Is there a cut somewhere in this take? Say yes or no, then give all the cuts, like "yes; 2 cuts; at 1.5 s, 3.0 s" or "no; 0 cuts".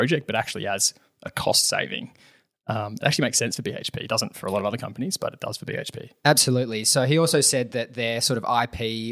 no; 0 cuts